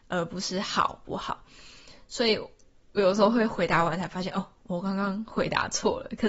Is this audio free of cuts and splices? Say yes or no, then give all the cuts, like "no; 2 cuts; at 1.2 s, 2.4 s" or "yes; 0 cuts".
yes; 0 cuts